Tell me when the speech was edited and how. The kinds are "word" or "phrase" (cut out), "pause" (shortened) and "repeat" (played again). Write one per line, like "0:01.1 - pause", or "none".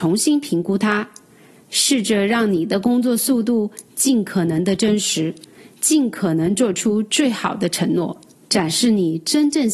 0:08.3 - pause